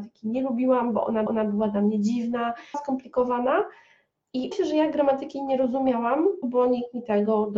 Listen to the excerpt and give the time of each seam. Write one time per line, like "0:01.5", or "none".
0:01.3
0:02.7
0:04.5
0:06.4